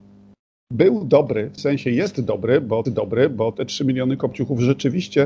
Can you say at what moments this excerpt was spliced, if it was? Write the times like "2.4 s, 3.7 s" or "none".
1.6 s, 2.9 s